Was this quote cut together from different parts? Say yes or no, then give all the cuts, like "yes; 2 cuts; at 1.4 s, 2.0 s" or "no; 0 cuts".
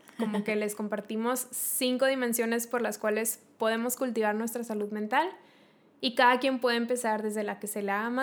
no; 0 cuts